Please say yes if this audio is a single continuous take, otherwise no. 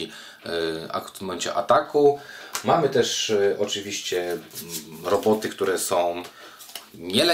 yes